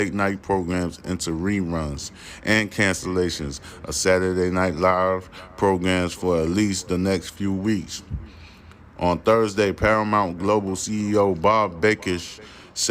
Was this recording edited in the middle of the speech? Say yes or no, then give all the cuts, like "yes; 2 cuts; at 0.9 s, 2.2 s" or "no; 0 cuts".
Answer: no; 0 cuts